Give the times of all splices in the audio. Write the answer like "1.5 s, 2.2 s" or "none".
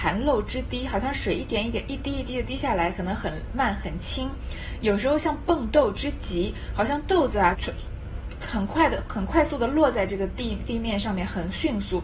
7.5 s